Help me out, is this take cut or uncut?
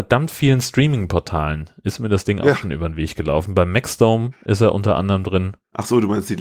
cut